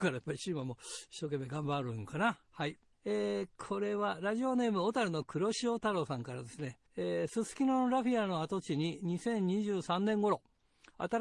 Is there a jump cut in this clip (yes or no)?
yes